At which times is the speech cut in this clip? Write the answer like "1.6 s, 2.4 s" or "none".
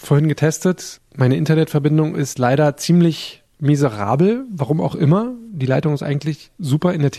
3.5 s